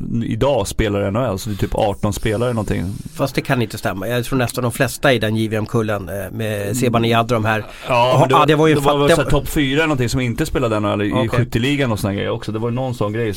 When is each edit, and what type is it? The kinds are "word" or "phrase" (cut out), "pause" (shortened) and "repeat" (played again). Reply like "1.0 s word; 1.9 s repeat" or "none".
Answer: 6.3 s word; 8.4 s word

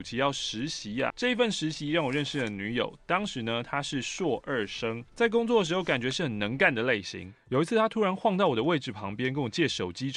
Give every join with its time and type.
1.1 s word; 5.1 s pause

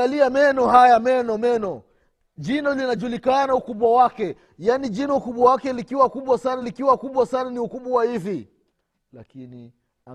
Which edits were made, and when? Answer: 6.6 s repeat; 8.7 s pause

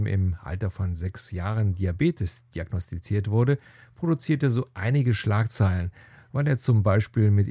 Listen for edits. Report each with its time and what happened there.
none

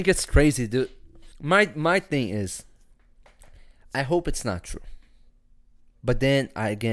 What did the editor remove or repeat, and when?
1.3 s pause

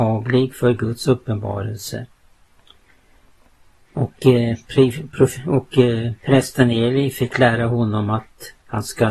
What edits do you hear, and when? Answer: 6.2 s pause

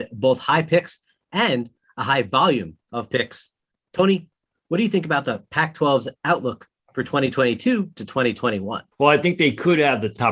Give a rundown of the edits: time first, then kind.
2.8 s pause; 8.0 s word; 8.9 s pause

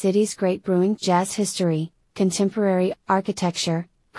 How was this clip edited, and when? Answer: 1.0 s word; 2.9 s word

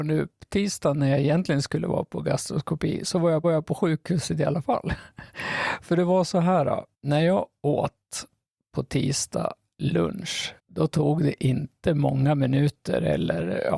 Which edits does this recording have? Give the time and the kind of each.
3.4 s repeat; 6.9 s pause; 10.6 s pause

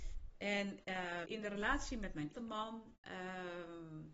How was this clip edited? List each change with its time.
1.2 s word; 2.3 s word

